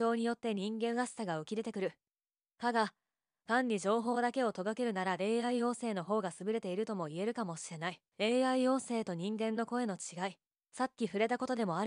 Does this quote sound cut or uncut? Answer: cut